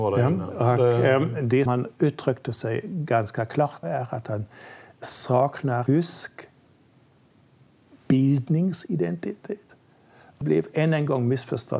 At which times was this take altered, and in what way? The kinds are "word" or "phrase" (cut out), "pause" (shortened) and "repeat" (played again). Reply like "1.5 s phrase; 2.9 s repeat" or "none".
1.7 s word; 3.8 s word; 5.9 s word; 10.4 s word